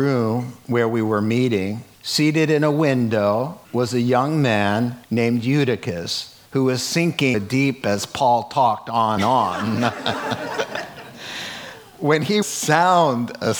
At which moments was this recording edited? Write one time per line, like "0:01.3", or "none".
0:01.9
0:03.6
0:05.0
0:06.5
0:07.3
0:07.8
0:09.2
0:12.4